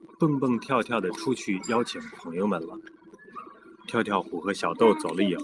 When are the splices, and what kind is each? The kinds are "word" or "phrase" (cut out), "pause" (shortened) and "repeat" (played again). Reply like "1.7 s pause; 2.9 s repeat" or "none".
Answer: none